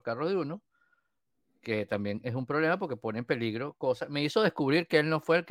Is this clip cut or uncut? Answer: uncut